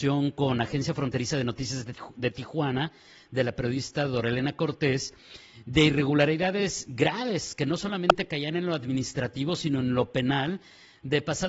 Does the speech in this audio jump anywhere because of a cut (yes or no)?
no